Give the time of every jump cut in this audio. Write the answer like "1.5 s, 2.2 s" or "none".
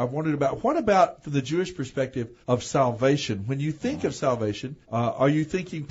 2.4 s, 4.8 s